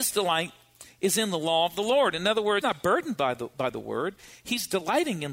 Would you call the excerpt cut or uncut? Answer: cut